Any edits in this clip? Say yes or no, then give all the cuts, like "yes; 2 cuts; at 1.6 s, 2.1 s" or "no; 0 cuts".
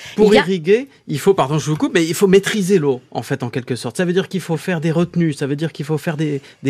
no; 0 cuts